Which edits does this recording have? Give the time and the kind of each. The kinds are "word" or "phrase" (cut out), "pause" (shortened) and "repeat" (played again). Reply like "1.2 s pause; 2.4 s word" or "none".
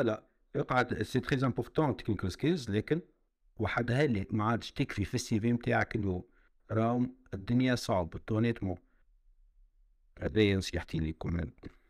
none